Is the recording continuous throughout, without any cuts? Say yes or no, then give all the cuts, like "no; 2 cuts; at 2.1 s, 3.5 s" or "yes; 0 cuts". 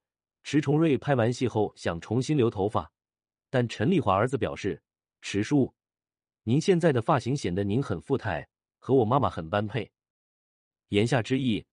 yes; 0 cuts